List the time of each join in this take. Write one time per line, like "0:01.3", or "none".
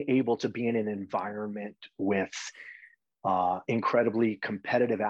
none